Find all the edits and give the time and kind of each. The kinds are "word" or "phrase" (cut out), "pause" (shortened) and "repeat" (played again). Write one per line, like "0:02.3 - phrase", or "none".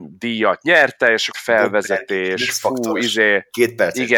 0:01.3 - phrase